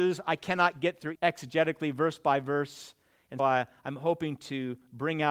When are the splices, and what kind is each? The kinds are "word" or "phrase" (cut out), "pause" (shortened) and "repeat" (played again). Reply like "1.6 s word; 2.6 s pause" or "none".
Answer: 1.1 s phrase; 3.4 s word